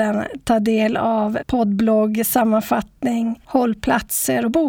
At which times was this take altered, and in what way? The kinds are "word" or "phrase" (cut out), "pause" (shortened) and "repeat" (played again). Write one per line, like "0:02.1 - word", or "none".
0:01.4 - word

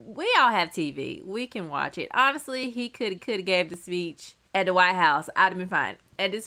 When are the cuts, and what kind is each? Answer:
0:03.2 - repeat
0:04.5 - pause

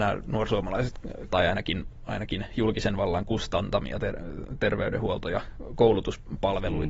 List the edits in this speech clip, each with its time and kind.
0:01.3 - phrase

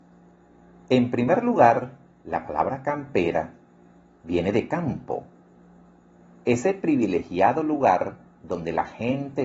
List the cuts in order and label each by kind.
none

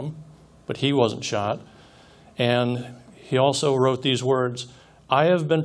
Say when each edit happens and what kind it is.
none

